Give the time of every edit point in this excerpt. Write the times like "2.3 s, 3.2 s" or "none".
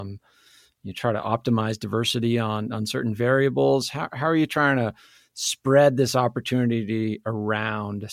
none